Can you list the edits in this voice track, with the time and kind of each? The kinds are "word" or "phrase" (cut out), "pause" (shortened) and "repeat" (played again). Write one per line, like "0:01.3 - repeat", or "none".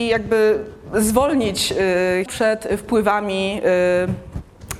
0:02.3 - phrase